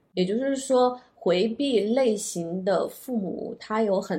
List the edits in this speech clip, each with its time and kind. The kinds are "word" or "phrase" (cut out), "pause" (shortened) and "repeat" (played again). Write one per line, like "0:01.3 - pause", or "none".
none